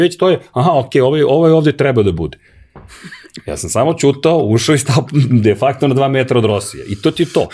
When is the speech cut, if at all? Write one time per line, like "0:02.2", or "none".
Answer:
none